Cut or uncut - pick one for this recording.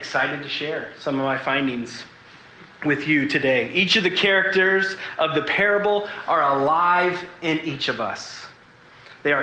uncut